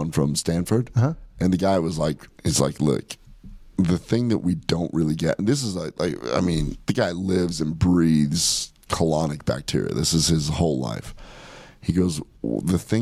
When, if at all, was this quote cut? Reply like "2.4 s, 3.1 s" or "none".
2.4 s

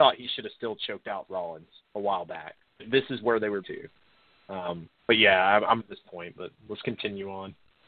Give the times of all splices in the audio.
1.3 s, 1.8 s, 2.8 s, 3.6 s, 5.0 s, 5.8 s

